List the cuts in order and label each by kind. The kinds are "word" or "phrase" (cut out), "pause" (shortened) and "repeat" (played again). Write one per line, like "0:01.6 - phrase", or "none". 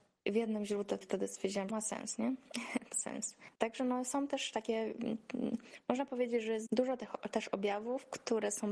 0:01.0 - phrase
0:01.7 - phrase
0:02.9 - word
0:03.5 - pause
0:06.7 - word